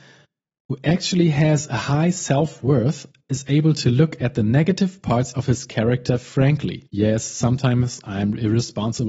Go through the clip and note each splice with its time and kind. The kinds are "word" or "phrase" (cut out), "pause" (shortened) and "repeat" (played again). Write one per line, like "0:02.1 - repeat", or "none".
0:06.9 - pause